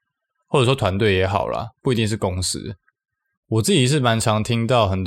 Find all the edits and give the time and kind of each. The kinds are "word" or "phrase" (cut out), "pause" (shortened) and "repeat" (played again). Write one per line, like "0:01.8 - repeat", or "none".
none